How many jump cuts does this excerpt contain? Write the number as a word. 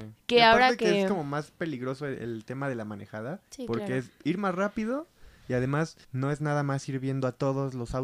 two